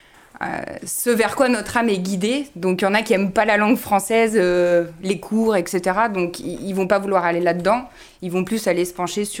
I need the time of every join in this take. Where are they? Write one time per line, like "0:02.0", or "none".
none

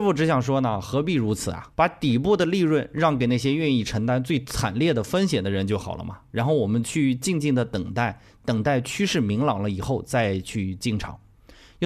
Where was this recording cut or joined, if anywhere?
0:01.7

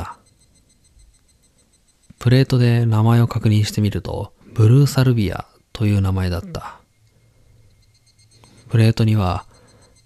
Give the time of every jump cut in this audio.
0:04.4

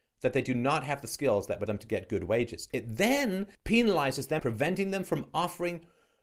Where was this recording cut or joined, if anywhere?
0:01.7
0:03.5
0:04.4

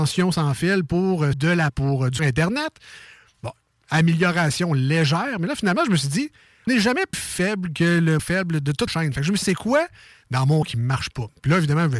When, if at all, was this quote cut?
0:01.3
0:01.7
0:02.2
0:06.7
0:07.1
0:08.2
0:08.9
0:09.4
0:10.6

